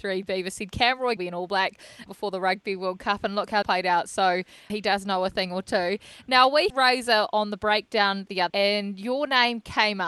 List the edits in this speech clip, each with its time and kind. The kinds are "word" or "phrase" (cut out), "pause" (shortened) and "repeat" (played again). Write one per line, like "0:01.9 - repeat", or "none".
0:01.2 - word
0:02.1 - word
0:03.6 - word
0:04.7 - word
0:06.7 - word
0:08.5 - word